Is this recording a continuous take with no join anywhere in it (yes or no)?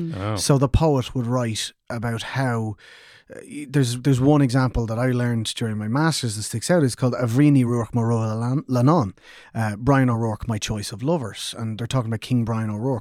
yes